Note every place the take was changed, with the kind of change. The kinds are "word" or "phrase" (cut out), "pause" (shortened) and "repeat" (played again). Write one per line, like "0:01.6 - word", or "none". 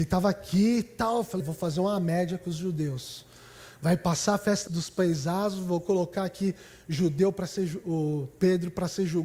0:01.4 - word
0:04.7 - word